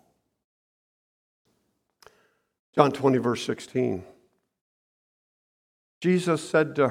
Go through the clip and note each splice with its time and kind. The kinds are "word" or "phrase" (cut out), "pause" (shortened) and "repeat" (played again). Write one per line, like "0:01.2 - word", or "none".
none